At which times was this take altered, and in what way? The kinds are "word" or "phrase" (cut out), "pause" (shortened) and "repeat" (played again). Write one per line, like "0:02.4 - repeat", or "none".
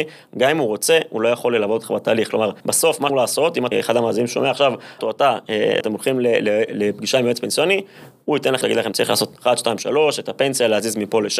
0:02.6 - pause
0:03.1 - phrase
0:03.7 - word
0:05.0 - word
0:05.8 - word
0:08.6 - word
0:08.9 - word